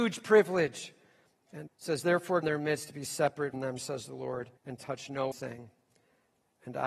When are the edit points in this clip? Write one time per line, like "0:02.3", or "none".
0:01.7
0:02.4
0:03.5
0:04.6
0:05.3

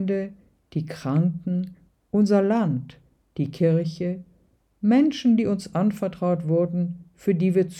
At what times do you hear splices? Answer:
none

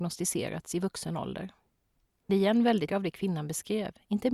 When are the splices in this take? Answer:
0:02.3
0:02.9

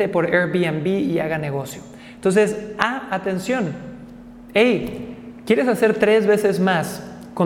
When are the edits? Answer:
none

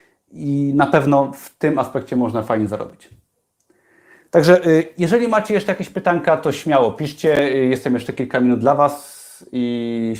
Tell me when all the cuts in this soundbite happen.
none

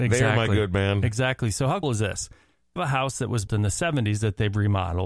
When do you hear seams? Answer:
0:01.8
0:02.8
0:03.5

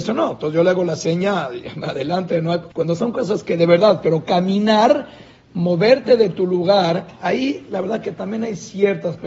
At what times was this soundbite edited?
0:02.7

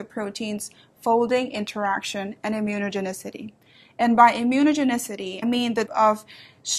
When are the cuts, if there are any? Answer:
0:05.4
0:05.9

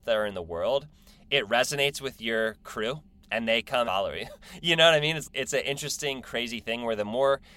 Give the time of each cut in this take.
0:03.9
0:05.2

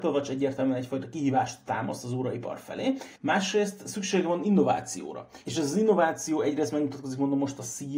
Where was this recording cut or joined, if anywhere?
0:03.2

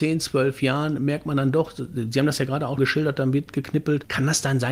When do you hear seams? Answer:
0:02.8

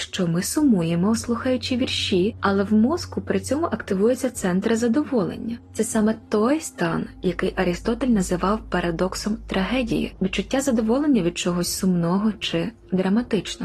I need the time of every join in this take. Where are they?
none

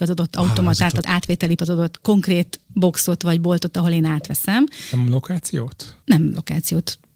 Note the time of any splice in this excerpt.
0:01.0
0:01.6
0:06.0

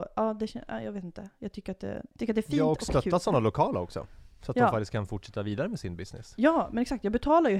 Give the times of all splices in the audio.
0:02.1

